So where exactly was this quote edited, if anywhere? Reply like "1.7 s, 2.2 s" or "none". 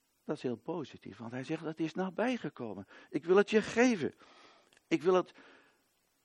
none